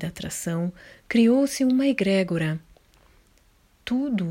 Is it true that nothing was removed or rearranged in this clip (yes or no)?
yes